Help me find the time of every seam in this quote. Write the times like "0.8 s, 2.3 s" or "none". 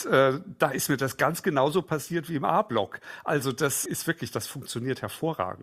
3.9 s